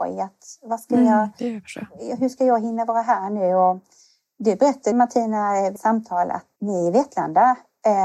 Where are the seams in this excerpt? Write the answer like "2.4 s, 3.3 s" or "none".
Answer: 4.9 s, 5.8 s, 6.6 s